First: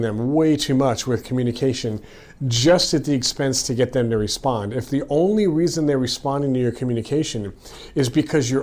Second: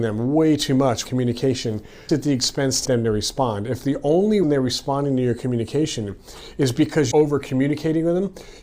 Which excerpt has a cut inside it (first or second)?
second